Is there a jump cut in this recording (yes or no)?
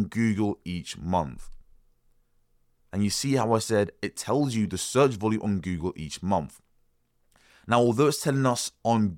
no